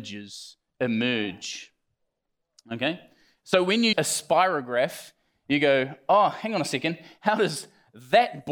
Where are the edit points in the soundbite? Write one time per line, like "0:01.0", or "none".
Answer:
0:03.9